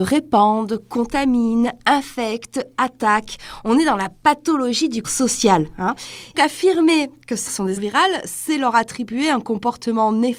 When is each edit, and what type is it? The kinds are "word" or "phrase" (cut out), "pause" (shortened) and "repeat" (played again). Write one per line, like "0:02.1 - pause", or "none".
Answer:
0:05.0 - word
0:06.3 - word
0:07.5 - word
0:07.8 - word